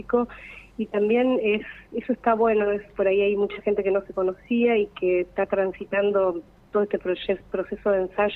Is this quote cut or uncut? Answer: uncut